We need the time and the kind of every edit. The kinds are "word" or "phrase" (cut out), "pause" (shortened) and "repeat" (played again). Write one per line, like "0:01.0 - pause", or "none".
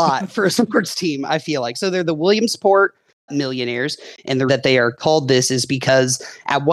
0:03.3 - word
0:04.5 - word